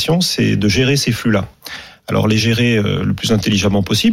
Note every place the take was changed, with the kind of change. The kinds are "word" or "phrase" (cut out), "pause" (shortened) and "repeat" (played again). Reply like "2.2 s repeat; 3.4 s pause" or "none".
none